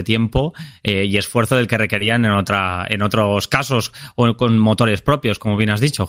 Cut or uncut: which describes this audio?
uncut